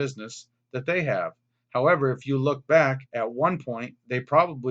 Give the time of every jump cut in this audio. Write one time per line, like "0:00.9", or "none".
0:03.1